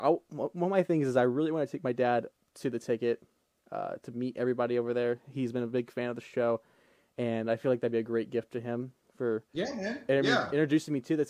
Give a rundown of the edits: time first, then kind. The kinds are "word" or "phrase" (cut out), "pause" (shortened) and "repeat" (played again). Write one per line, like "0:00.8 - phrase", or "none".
none

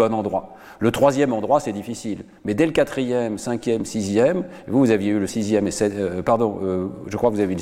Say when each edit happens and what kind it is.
0:05.3 - word

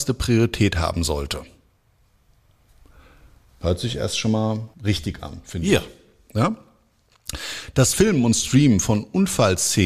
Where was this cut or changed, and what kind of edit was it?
0:04.7 - pause

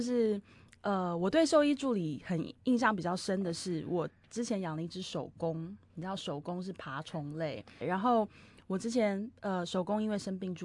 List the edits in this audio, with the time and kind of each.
0:07.8 - word

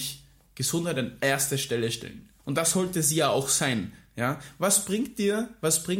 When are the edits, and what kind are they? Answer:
0:02.4 - pause

